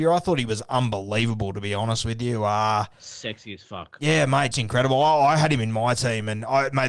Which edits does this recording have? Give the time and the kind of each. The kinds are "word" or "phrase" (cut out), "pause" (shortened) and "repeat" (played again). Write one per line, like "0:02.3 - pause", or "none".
0:04.5 - word